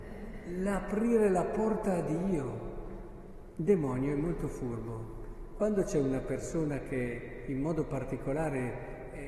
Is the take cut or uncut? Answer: uncut